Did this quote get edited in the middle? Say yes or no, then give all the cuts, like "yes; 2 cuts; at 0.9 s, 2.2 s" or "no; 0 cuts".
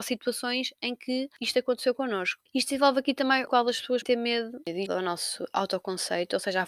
yes; 3 cuts; at 3.5 s, 4.0 s, 4.9 s